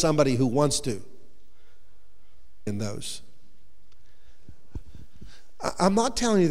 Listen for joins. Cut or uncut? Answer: cut